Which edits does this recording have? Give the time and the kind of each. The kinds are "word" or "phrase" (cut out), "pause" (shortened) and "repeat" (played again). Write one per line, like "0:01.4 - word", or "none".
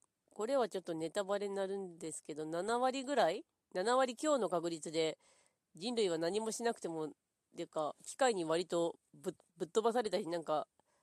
0:03.6 - pause
0:08.0 - pause